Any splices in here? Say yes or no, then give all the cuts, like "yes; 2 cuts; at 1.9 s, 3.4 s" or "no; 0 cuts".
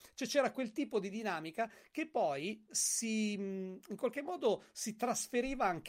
no; 0 cuts